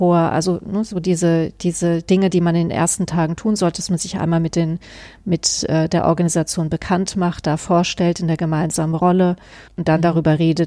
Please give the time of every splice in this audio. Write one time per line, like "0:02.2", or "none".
none